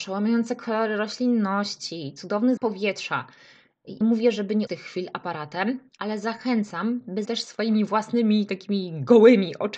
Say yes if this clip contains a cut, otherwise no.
yes